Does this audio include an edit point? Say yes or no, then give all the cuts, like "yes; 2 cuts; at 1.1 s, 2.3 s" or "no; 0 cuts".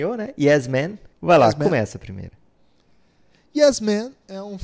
yes; 1 cut; at 1.1 s